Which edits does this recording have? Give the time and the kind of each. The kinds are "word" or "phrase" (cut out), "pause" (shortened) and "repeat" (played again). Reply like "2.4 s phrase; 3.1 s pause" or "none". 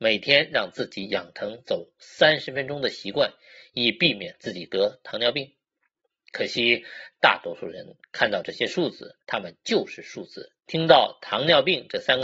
9.2 s pause